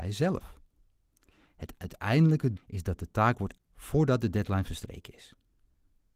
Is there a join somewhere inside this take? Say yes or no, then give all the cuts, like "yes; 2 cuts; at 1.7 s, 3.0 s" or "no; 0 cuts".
yes; 2 cuts; at 2.6 s, 3.6 s